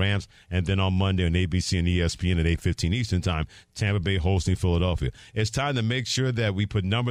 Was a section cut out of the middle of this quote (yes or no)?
no